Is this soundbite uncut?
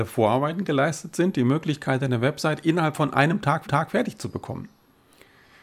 no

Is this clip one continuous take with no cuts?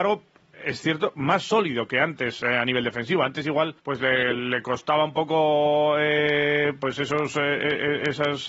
no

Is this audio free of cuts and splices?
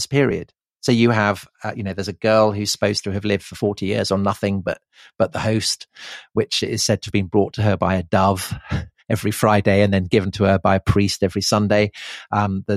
yes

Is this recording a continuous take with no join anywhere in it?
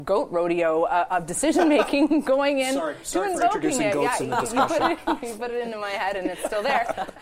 yes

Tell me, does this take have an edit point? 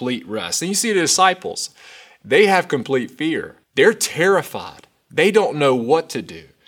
yes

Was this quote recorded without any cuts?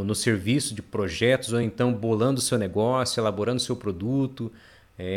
yes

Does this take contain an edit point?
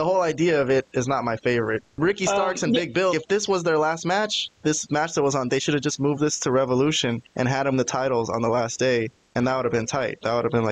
yes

